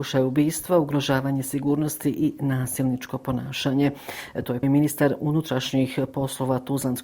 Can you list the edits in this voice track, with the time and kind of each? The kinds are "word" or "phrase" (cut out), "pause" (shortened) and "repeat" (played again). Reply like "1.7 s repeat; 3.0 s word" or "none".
4.6 s word